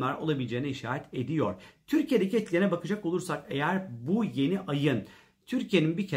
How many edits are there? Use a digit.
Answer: 0